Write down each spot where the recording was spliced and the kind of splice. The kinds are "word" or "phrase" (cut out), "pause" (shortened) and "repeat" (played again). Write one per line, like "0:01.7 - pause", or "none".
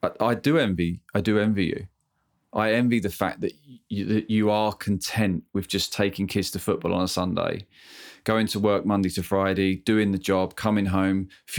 none